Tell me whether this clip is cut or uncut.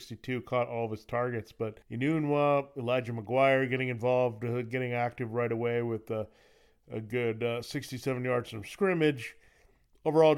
cut